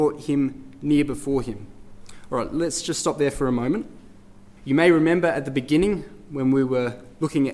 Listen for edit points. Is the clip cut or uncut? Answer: cut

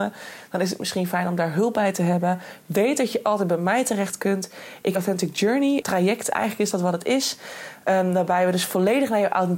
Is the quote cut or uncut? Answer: cut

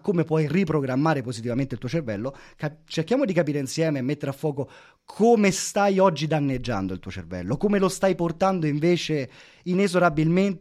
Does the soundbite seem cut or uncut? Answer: uncut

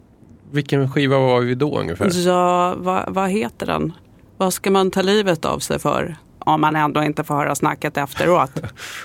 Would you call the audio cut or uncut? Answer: uncut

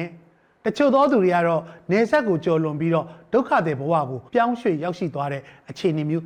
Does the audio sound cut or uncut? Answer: cut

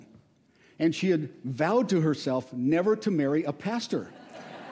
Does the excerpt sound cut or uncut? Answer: uncut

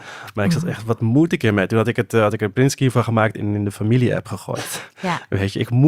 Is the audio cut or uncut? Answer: uncut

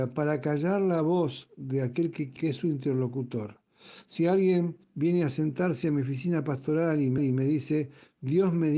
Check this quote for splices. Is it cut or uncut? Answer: cut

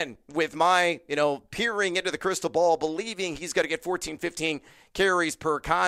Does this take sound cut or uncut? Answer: uncut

